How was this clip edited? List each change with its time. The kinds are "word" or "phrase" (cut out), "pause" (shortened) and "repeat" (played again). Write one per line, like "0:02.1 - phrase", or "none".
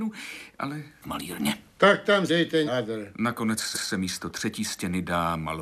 0:01.0 - phrase
0:01.7 - pause
0:02.3 - word
0:02.7 - word
0:03.7 - repeat